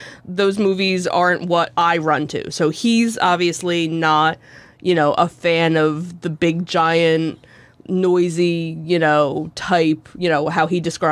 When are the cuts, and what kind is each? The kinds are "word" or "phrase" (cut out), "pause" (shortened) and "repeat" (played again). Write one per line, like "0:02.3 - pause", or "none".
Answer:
none